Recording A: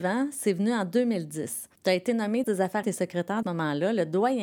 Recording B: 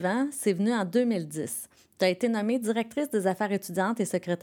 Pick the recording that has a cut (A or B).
A